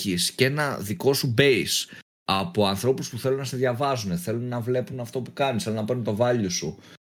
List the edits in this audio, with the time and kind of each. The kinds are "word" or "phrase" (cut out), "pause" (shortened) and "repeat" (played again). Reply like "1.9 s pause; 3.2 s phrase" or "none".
none